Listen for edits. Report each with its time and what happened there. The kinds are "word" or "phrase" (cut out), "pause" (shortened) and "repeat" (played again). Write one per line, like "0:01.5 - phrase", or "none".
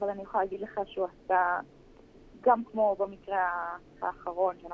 none